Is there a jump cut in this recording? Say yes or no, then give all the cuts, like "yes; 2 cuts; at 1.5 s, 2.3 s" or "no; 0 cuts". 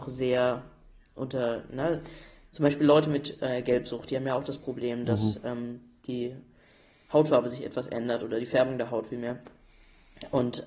no; 0 cuts